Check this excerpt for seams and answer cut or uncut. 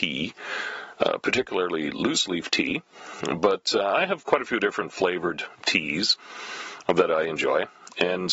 uncut